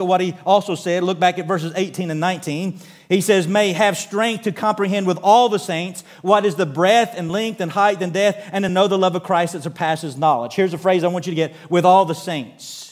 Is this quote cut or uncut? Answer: uncut